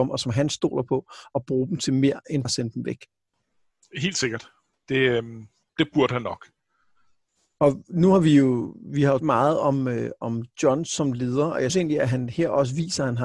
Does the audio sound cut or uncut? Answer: cut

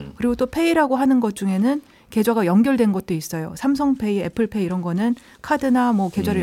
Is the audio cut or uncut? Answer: uncut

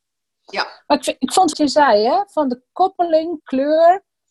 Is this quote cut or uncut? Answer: cut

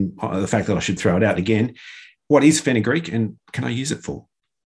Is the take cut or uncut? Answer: cut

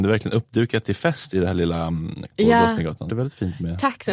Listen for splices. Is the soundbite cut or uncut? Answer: cut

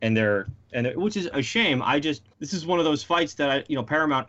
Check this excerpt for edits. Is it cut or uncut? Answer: cut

